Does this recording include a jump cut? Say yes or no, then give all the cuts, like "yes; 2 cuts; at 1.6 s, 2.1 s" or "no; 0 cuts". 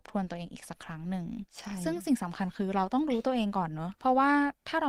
yes; 1 cut; at 4.0 s